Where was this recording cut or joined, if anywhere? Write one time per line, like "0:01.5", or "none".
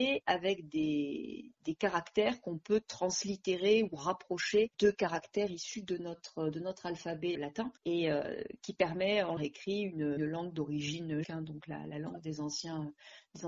0:04.7
0:07.3
0:07.8
0:09.4
0:10.2
0:11.2